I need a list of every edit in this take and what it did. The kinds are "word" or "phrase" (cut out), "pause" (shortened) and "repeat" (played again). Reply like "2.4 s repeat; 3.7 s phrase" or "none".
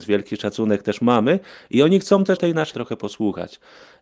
2.4 s word; 2.7 s word